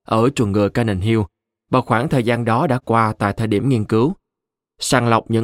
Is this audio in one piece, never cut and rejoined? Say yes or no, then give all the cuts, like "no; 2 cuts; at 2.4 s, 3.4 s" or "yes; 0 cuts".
yes; 0 cuts